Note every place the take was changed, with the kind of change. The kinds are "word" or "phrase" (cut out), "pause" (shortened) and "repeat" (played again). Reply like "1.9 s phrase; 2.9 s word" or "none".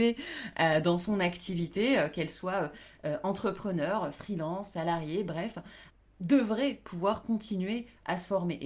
none